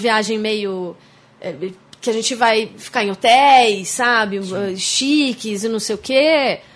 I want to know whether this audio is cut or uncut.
uncut